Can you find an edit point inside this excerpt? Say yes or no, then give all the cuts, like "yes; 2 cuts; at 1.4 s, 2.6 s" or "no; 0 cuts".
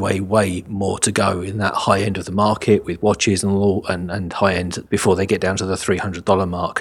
yes; 1 cut; at 4.9 s